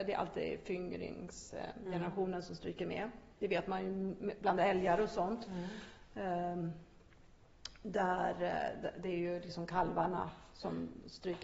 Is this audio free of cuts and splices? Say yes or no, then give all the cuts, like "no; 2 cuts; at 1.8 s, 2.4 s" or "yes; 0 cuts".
yes; 0 cuts